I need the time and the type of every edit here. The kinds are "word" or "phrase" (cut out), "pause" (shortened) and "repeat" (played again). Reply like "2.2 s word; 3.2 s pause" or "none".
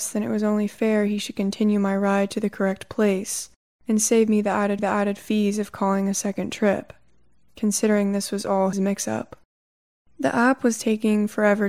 4.8 s repeat; 8.7 s word